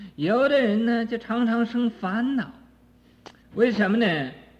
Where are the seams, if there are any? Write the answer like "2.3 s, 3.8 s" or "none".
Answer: 3.4 s